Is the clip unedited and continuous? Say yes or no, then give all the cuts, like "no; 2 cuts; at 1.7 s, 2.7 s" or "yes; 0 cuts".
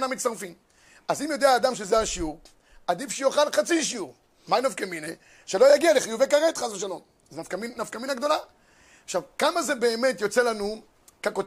yes; 0 cuts